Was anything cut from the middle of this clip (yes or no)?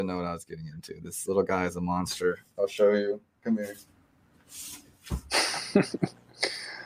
no